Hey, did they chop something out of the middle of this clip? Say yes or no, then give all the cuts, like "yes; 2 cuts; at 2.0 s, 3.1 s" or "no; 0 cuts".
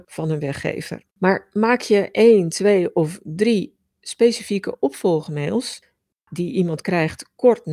yes; 1 cut; at 1.1 s